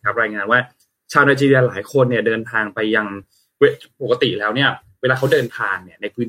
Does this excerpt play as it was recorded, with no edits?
yes; 0 cuts

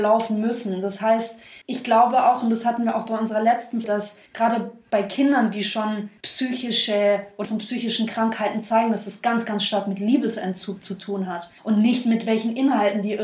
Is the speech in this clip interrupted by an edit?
yes; 6 cuts; at 1.6 s, 3.8 s, 4.3 s, 6.2 s, 7.4 s, 11.6 s

